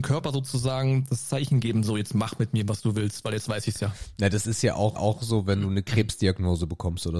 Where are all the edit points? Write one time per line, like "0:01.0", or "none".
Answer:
0:05.0